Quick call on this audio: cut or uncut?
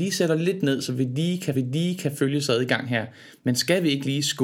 cut